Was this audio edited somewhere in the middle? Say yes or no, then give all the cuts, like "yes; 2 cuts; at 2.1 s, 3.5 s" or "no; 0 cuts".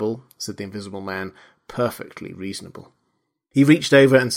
no; 0 cuts